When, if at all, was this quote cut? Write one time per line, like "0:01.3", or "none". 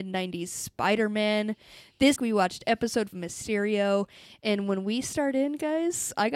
0:02.2
0:03.1